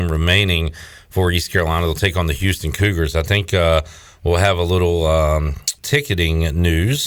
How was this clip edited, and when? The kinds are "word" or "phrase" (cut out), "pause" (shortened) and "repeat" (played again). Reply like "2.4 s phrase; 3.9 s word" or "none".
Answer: 5.8 s pause